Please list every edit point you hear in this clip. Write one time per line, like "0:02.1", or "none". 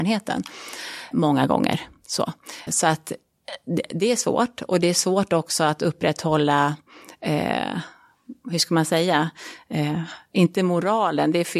0:01.1
0:02.7